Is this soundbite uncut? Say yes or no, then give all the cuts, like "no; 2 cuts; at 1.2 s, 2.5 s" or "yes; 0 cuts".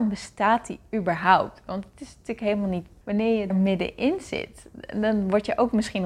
no; 2 cuts; at 3.0 s, 3.5 s